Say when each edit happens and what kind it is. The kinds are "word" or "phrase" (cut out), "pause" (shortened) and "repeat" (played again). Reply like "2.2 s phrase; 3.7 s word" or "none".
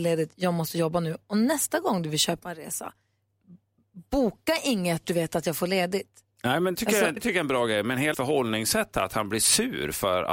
5.0 s word; 6.7 s word; 7.2 s word; 8.1 s word